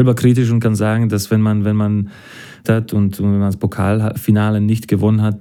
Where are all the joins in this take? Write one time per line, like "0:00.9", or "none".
0:02.6